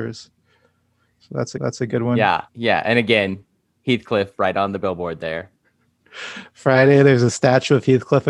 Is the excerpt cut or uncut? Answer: cut